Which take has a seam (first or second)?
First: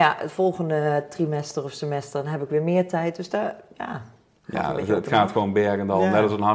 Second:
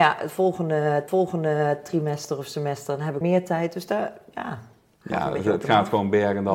second